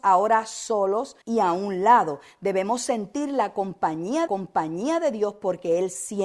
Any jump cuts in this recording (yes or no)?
yes